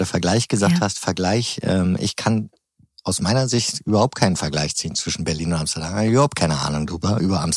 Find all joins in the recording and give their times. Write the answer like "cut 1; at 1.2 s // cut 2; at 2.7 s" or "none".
none